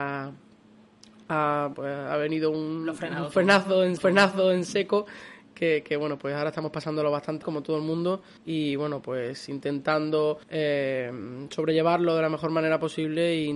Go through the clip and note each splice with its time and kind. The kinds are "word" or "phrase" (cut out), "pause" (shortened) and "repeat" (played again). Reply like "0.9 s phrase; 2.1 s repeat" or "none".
1.7 s word; 4.0 s repeat; 7.4 s word; 8.4 s pause; 10.4 s pause